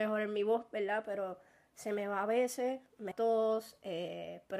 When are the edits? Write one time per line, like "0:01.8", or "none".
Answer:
0:03.1